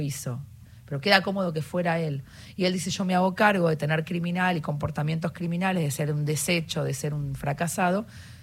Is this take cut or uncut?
cut